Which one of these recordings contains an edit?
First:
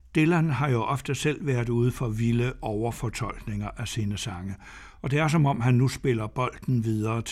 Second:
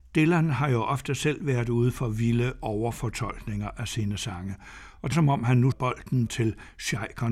second; 3 cuts; at 5.1 s, 5.7 s, 6.3 s

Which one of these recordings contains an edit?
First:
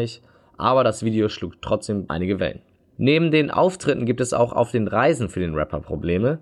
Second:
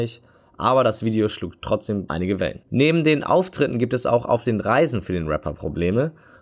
second; 1 cut; at 2.6 s

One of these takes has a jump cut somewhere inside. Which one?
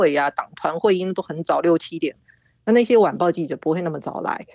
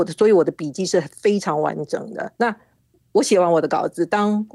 second; 1 cut; at 2.3 s

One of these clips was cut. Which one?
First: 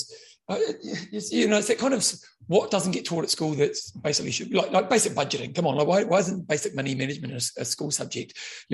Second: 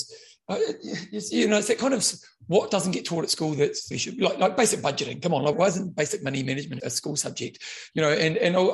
second; 3 cuts; at 3.9 s, 5.5 s, 6.8 s

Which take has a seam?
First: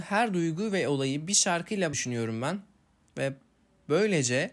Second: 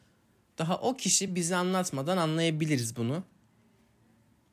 first; 1 cut; at 1.9 s

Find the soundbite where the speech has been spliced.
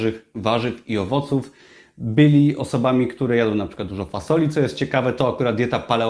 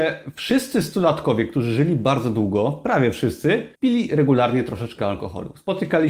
second; 1 cut; at 3.7 s

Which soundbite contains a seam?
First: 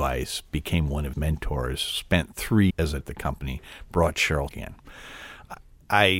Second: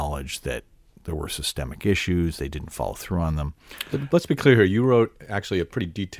first; 4 cuts; at 1.1 s, 2.7 s, 3.0 s, 4.5 s

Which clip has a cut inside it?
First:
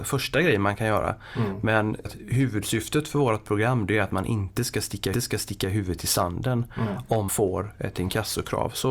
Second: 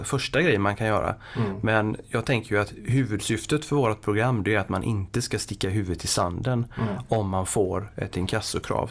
first; 3 cuts; at 2.1 s, 5.1 s, 7.3 s

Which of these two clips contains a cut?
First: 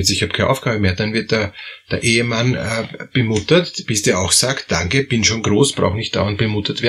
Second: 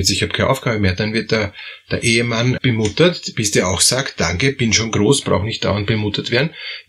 second; 1 cut; at 2.6 s

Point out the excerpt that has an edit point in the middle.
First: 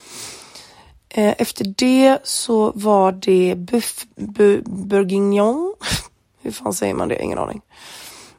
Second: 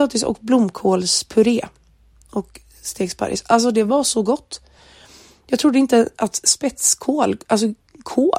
first; 1 cut; at 4.1 s

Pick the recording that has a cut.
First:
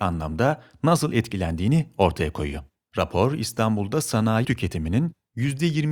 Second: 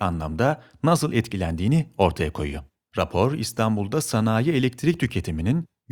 first; 1 cut; at 4.4 s

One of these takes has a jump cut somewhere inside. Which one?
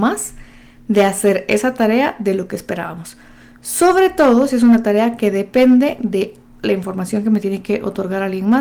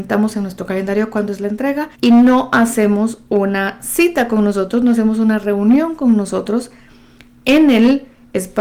second; 1 cut; at 1.9 s

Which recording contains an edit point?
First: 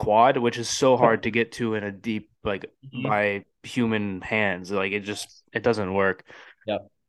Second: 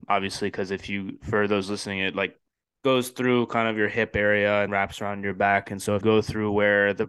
second; 3 cuts; at 2.5 s, 4.7 s, 6.0 s

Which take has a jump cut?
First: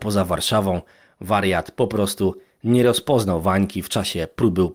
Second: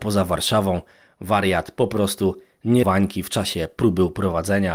second; 1 cut; at 2.8 s

